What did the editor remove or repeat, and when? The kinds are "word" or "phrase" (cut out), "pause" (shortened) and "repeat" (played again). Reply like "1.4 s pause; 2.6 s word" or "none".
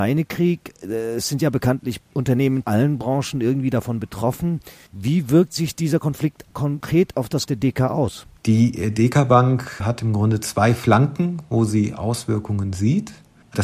2.6 s word; 7.5 s word; 8.4 s pause